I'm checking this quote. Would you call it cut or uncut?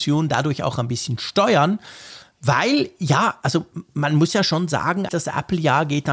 cut